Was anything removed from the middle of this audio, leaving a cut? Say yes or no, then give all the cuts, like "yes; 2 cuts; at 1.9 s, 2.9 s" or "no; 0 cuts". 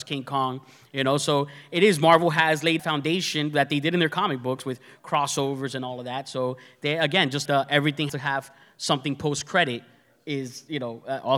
yes; 3 cuts; at 2.8 s, 7.5 s, 8.1 s